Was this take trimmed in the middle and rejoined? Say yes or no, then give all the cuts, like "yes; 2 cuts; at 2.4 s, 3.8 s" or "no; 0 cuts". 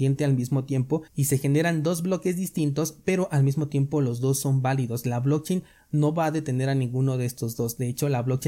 no; 0 cuts